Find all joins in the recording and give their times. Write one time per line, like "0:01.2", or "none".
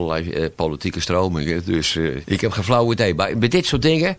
0:02.2